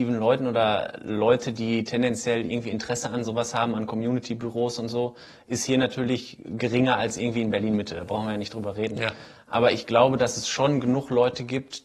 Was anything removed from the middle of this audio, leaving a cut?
no; 0 cuts

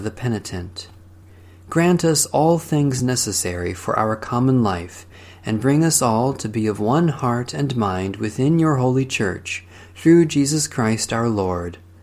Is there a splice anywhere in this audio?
no; 0 cuts

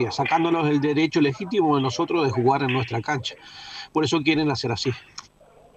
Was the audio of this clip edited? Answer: no; 0 cuts

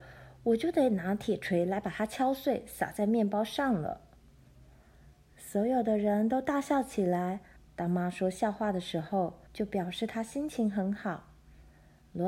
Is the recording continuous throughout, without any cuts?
no; 2 cuts; at 7.6 s, 9.5 s

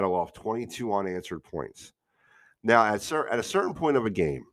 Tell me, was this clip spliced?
no; 0 cuts

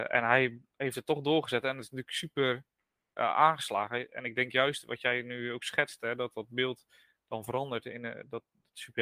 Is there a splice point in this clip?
no; 0 cuts

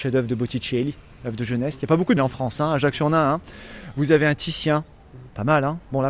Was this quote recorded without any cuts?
no; 1 cut; at 2.2 s

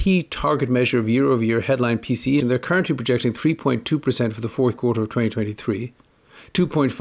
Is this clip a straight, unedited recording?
no; 1 cut; at 2.4 s

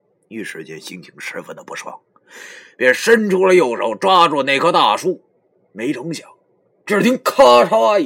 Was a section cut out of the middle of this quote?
no; 0 cuts

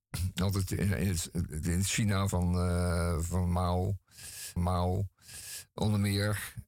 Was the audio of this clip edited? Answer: yes; 3 cuts; at 1.6 s, 2.3 s, 4.6 s

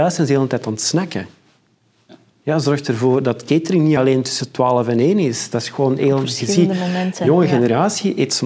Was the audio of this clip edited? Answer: no; 0 cuts

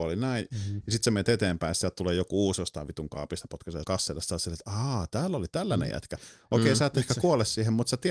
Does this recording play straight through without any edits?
no; 1 cut; at 3.8 s

